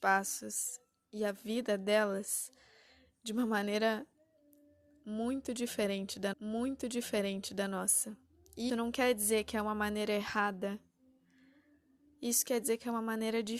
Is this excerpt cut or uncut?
cut